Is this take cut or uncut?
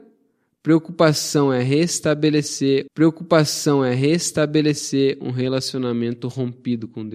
cut